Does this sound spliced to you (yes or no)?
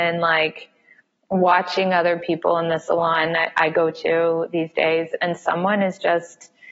no